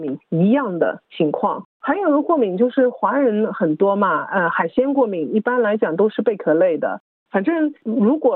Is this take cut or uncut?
uncut